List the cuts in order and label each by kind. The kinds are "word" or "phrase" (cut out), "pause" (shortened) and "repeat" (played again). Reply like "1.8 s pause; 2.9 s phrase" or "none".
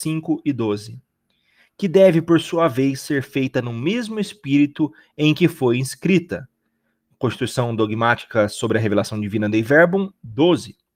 none